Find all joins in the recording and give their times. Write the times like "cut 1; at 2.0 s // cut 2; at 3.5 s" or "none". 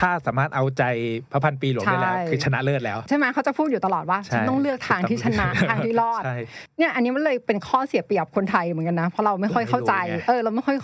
none